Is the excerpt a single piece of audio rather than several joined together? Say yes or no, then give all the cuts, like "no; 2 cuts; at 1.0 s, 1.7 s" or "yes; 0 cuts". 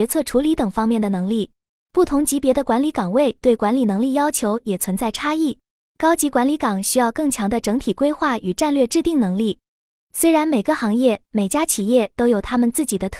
yes; 0 cuts